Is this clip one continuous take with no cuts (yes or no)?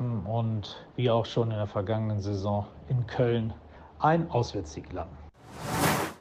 yes